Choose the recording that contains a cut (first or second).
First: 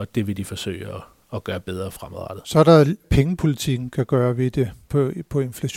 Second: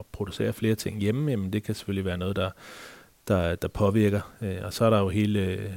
first